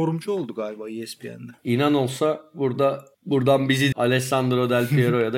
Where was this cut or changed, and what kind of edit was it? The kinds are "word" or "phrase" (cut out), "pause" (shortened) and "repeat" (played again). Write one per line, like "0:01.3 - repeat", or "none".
0:01.6 - pause
0:03.1 - pause
0:03.9 - word